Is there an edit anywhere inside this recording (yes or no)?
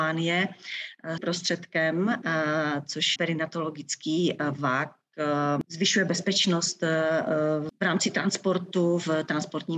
yes